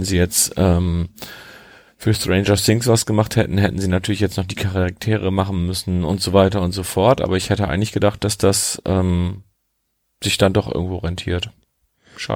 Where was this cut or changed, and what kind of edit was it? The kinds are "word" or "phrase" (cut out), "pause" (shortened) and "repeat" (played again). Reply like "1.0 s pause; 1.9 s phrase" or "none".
none